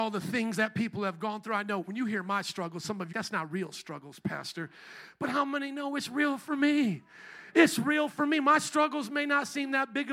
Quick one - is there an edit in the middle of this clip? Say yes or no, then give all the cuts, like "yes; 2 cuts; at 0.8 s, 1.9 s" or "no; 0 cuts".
yes; 1 cut; at 3.1 s